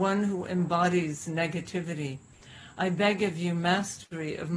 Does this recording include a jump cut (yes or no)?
no